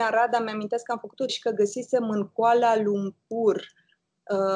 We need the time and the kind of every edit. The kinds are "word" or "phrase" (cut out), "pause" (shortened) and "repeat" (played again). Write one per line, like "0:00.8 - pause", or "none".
0:01.3 - word